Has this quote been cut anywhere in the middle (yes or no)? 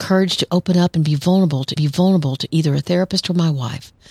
yes